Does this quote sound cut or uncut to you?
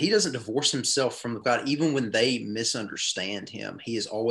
cut